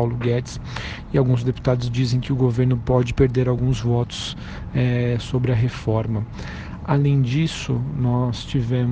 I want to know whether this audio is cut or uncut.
uncut